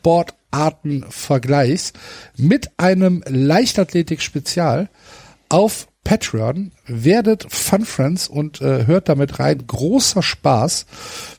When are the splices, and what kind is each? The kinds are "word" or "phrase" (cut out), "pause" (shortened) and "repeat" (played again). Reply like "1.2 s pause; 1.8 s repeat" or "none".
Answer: none